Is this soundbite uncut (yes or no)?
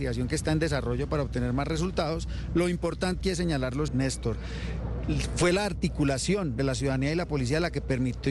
no